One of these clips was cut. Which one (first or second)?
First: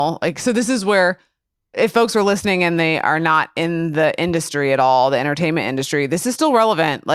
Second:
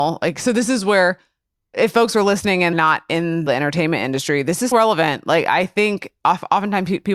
second